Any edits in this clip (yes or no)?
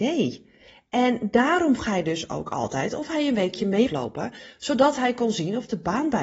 yes